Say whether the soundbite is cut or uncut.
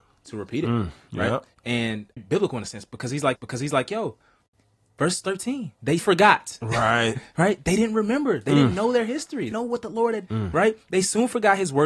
cut